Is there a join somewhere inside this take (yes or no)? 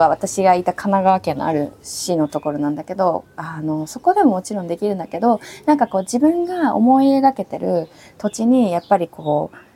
no